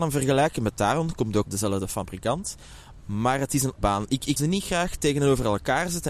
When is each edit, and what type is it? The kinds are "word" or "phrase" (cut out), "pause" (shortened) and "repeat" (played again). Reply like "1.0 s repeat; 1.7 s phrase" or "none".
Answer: 1.4 s word; 3.8 s word; 4.4 s word